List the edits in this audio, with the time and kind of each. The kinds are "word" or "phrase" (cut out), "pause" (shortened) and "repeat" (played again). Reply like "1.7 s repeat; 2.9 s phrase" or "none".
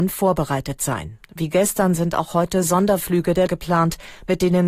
3.5 s word